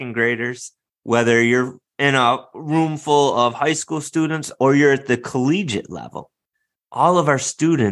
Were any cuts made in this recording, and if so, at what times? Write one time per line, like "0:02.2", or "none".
none